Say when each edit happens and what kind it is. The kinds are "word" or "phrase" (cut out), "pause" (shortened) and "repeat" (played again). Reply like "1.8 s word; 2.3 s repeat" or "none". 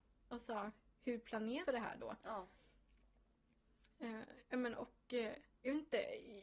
1.6 s word; 5.5 s pause